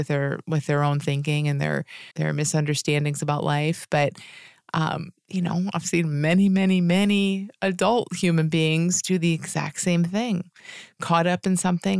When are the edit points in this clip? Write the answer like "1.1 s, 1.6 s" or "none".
2.1 s